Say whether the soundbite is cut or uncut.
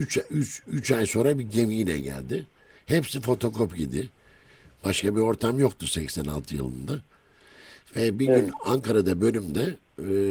uncut